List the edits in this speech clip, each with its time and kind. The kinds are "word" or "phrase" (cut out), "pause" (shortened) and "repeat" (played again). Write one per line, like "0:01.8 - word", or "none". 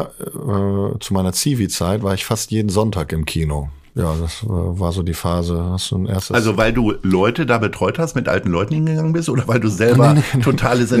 0:09.4 - word